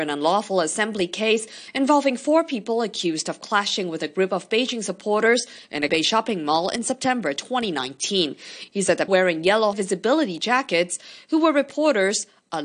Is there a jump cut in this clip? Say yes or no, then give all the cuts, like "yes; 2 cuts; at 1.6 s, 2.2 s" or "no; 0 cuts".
yes; 3 cuts; at 5.9 s, 9.1 s, 9.7 s